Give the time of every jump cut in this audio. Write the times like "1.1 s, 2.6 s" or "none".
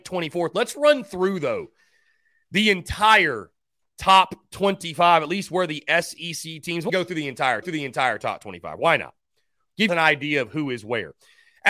6.9 s, 7.6 s, 9.9 s